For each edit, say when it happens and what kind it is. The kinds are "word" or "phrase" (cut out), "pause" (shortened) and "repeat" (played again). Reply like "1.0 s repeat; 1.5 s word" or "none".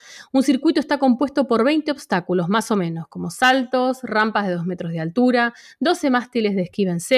none